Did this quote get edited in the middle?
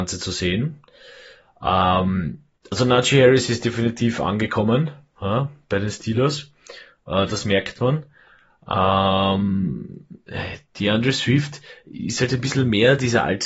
no; 0 cuts

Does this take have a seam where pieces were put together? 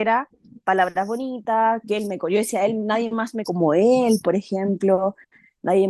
yes; 1 cut; at 3.4 s

